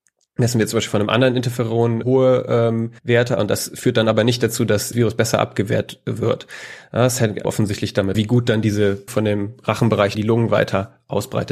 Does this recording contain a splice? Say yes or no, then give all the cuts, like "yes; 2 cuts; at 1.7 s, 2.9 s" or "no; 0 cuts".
yes; 7 cuts; at 2.0 s, 3.0 s, 4.9 s, 7.4 s, 8.1 s, 9.1 s, 10.1 s